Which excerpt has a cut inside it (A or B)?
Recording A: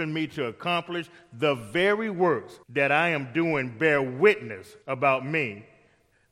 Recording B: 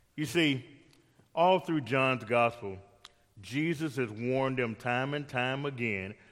A